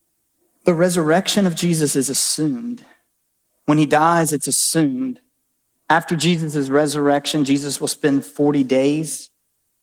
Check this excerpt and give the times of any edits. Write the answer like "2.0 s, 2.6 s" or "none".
none

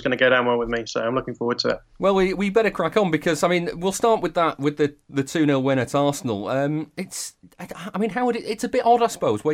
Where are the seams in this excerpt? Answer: none

